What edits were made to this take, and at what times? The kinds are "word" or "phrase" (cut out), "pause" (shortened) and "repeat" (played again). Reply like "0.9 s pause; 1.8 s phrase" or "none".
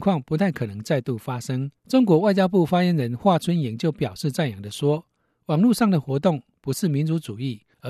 1.8 s pause